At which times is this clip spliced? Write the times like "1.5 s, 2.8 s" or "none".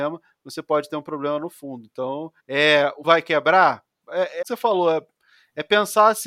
2.4 s, 3.0 s, 4.4 s